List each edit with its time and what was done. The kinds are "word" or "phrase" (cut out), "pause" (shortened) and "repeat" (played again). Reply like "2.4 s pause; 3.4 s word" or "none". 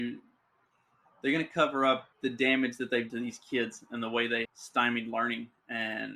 2.1 s pause; 3.1 s word; 4.4 s word

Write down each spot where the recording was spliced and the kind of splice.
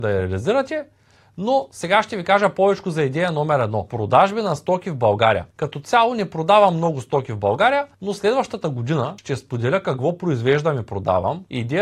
none

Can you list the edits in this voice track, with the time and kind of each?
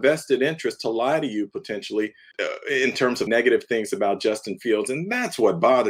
2.3 s word; 3.3 s word

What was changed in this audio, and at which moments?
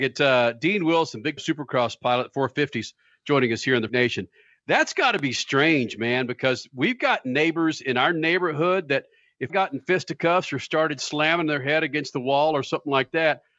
1.4 s word; 3.9 s word; 9.5 s word

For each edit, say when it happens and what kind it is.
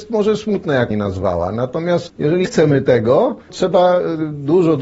0.9 s word; 2.1 s word; 2.4 s word; 3.5 s word

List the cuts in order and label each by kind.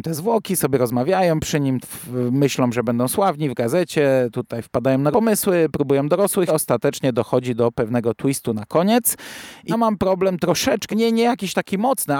1.8 s word; 5.1 s word; 6.5 s phrase; 9.7 s word; 10.9 s word

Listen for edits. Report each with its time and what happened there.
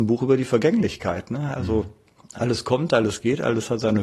none

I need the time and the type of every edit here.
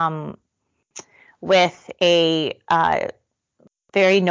none

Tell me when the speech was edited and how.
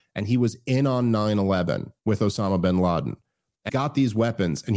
2.0 s pause; 3.7 s word

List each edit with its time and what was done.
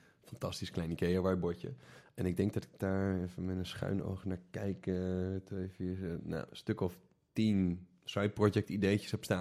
none

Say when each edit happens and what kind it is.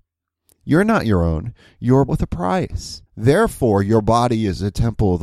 2.1 s word; 3.1 s pause

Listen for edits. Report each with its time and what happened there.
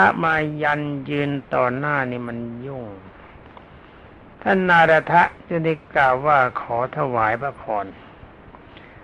5.4 s pause

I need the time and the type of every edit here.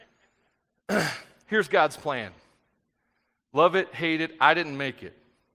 none

